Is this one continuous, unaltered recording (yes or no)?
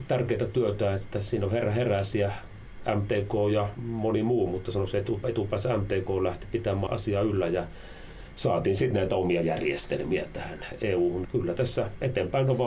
no